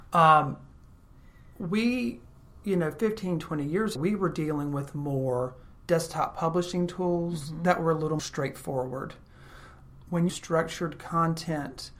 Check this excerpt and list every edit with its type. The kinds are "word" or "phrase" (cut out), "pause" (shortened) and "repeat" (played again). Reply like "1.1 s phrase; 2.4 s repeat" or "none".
4.0 s word; 8.2 s word; 10.3 s phrase